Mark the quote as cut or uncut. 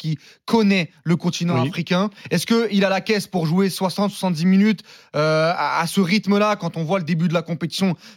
uncut